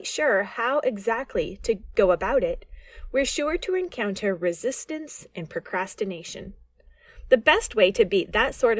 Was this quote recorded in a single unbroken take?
yes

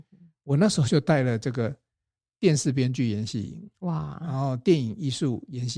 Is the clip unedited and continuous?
yes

